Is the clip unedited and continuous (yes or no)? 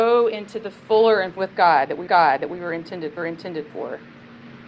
no